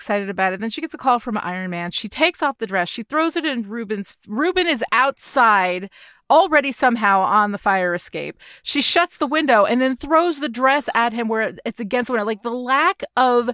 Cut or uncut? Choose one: uncut